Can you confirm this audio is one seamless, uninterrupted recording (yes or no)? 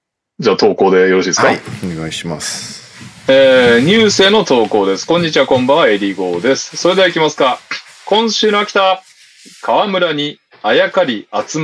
yes